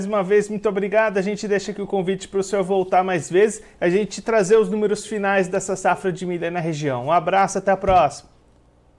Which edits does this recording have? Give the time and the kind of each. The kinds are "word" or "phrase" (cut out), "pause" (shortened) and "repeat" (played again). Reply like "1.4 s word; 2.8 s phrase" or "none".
none

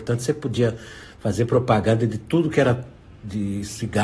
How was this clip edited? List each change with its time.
none

